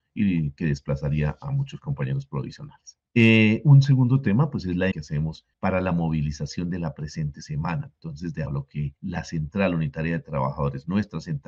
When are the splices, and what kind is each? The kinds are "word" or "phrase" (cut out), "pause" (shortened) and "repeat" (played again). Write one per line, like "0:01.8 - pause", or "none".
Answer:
0:03.1 - pause
0:04.9 - word
0:05.5 - pause
0:08.5 - word
0:09.0 - pause